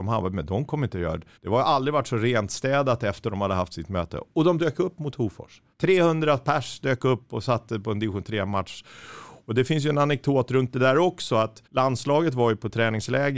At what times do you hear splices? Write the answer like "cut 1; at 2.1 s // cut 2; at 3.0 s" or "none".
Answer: cut 1; at 1.4 s // cut 2; at 5.7 s // cut 3; at 11.7 s